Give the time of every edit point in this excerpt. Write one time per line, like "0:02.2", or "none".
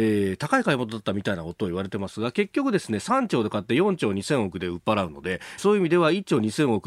0:05.6